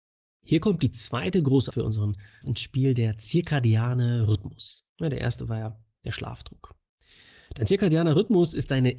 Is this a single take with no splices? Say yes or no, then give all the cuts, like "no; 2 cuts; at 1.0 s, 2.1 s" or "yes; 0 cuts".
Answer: no; 3 cuts; at 1.7 s, 2.4 s, 4.9 s